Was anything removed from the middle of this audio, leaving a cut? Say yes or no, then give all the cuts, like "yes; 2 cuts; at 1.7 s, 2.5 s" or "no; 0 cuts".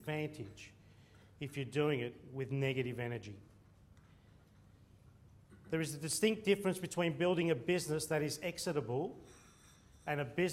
no; 0 cuts